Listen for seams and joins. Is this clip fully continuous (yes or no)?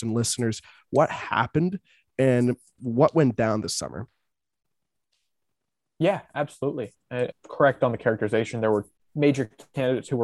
no